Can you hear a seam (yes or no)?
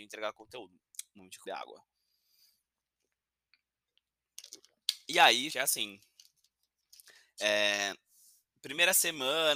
yes